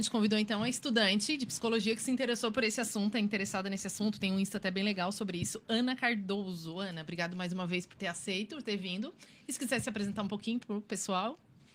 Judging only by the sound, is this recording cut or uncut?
uncut